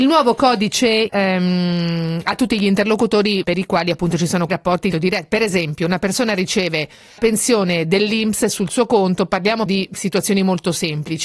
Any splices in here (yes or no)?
yes